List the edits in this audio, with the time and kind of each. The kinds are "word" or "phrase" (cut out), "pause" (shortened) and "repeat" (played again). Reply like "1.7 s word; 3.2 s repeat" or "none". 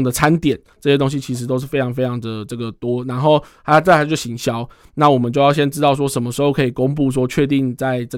none